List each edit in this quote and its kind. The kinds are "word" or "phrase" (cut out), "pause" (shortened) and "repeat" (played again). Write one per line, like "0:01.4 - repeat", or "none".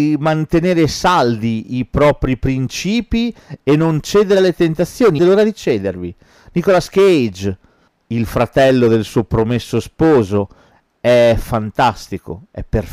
0:05.2 - phrase
0:07.9 - pause